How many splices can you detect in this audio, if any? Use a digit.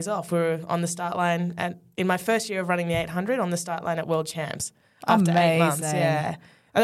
0